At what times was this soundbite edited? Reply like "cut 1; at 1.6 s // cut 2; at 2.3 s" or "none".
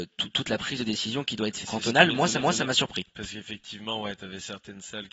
cut 1; at 1.6 s // cut 2; at 2.4 s // cut 3; at 3.1 s